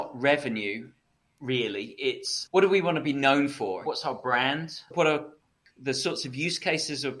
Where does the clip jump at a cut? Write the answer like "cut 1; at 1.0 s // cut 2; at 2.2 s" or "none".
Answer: none